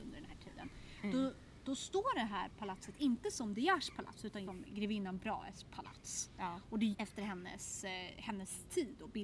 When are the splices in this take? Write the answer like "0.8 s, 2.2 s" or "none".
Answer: 4.5 s, 6.9 s